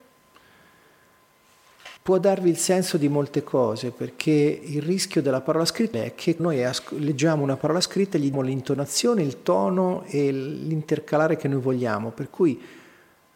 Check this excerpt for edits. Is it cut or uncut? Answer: cut